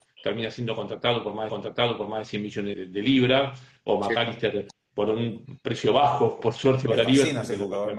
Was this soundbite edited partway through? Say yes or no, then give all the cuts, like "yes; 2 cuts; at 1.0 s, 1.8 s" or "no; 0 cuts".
yes; 3 cuts; at 1.5 s, 2.7 s, 4.9 s